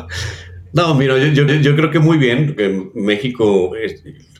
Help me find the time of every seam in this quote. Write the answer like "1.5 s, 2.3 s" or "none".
1.5 s